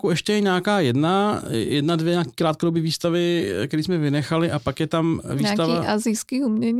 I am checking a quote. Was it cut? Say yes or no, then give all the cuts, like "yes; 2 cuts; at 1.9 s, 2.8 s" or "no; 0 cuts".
no; 0 cuts